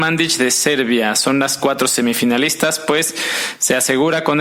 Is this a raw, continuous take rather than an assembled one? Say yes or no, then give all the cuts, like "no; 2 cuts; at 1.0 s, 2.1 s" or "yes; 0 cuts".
yes; 0 cuts